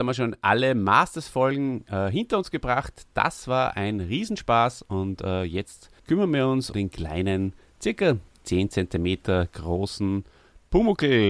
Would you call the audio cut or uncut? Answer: cut